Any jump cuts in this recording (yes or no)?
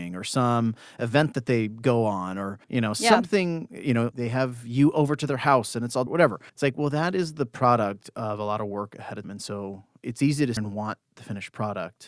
yes